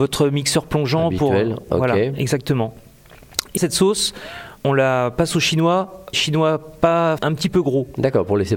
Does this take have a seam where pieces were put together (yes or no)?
yes